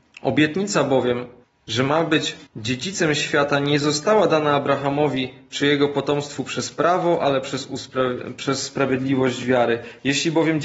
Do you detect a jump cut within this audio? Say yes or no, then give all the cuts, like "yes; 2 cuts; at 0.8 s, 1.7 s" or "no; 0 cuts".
yes; 2 cuts; at 1.4 s, 2.5 s